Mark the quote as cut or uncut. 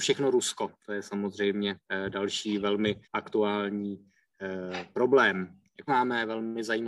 cut